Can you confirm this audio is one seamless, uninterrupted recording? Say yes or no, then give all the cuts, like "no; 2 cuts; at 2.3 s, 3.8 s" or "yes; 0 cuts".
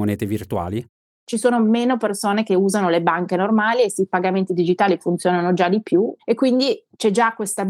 yes; 0 cuts